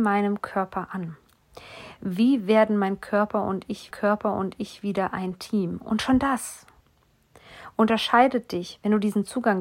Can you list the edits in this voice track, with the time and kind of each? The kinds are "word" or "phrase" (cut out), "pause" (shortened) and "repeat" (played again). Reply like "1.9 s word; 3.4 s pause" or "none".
3.9 s repeat